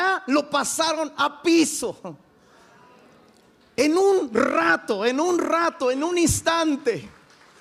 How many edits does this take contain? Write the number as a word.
zero